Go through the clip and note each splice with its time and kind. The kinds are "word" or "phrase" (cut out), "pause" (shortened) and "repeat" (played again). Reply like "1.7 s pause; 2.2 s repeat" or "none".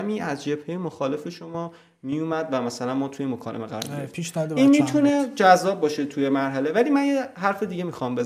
none